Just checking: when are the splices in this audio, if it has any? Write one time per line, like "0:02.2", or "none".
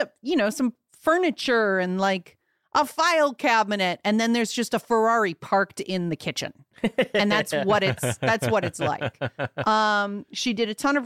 none